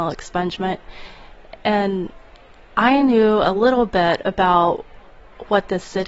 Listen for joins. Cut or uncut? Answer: uncut